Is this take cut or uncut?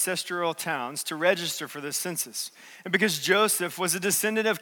uncut